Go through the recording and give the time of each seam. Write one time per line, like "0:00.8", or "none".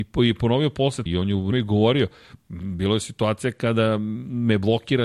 0:01.1
0:01.5